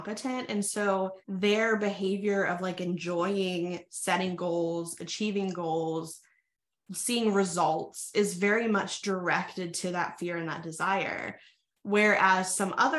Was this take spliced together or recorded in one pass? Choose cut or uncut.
cut